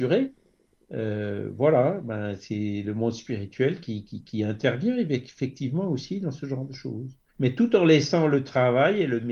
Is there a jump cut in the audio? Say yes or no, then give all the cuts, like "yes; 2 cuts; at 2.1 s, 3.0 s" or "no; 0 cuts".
yes; 1 cut; at 7.3 s